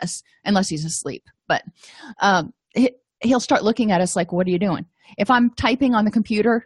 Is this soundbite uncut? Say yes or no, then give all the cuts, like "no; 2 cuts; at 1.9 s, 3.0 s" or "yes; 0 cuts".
yes; 0 cuts